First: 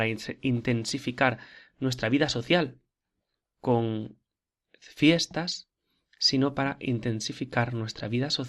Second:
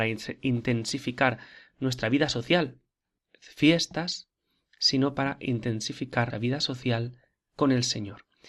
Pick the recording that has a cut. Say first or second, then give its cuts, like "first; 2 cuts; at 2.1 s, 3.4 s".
second; 2 cuts; at 3.2 s, 6.3 s